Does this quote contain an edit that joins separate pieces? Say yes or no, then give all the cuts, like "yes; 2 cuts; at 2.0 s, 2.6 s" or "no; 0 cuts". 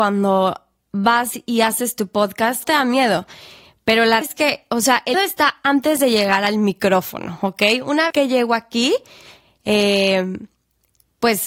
yes; 4 cuts; at 2.6 s, 4.2 s, 5.1 s, 8.1 s